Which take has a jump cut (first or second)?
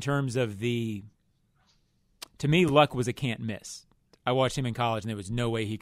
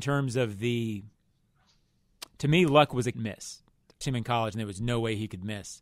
second